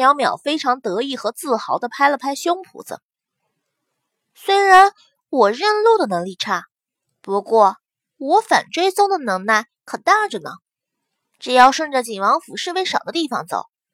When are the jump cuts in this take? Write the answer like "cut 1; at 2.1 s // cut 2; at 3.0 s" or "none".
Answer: none